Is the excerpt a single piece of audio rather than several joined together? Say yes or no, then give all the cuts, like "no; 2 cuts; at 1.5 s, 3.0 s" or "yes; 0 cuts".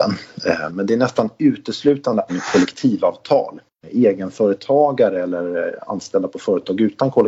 no; 1 cut; at 2.3 s